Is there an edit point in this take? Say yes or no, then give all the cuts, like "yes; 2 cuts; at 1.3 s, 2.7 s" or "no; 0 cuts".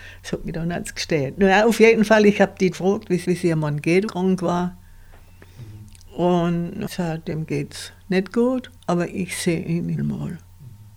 yes; 6 cuts; at 2.7 s, 3.2 s, 4.1 s, 6.9 s, 8.8 s, 10.0 s